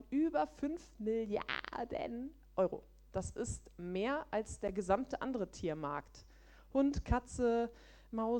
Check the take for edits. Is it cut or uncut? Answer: uncut